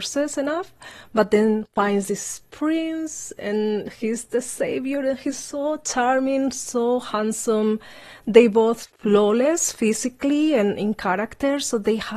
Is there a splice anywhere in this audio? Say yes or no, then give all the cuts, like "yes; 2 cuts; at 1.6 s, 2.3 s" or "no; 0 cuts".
no; 0 cuts